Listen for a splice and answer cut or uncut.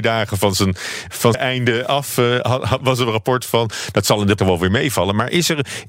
cut